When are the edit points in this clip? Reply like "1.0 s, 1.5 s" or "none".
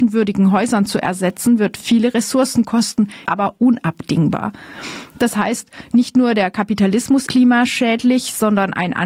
3.3 s, 7.3 s